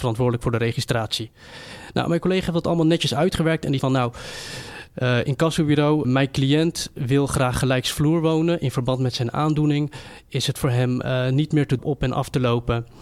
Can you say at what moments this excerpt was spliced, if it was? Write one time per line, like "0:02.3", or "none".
0:03.8
0:06.0
0:11.8